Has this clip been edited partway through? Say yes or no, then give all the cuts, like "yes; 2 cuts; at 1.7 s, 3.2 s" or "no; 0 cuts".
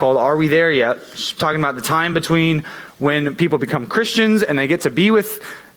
no; 0 cuts